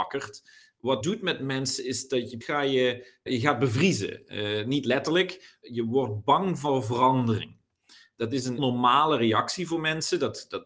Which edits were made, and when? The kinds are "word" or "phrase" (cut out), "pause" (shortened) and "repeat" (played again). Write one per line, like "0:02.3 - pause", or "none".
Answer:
0:01.0 - word
0:02.4 - word
0:03.3 - word
0:08.6 - word